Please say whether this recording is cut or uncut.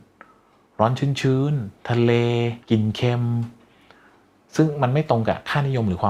cut